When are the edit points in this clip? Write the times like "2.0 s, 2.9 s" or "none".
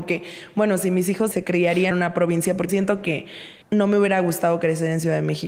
1.3 s, 1.9 s, 2.7 s, 3.6 s